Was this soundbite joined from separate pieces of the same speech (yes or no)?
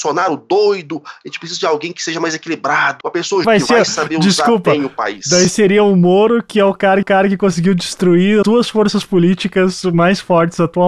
yes